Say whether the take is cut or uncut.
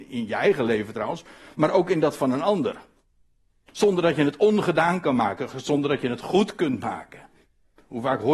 uncut